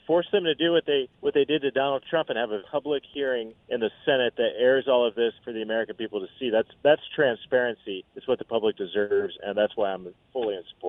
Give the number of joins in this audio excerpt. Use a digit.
6